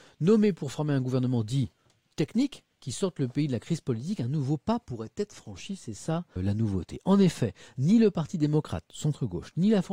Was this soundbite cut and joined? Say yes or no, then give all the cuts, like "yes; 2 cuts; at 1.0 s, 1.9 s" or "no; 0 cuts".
yes; 1 cut; at 6.4 s